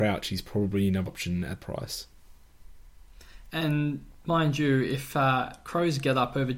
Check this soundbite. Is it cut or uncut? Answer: cut